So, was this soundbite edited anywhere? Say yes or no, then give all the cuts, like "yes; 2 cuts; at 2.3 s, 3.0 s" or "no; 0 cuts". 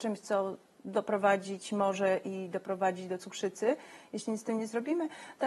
no; 0 cuts